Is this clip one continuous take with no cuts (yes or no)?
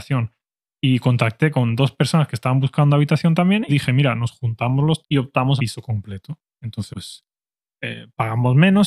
no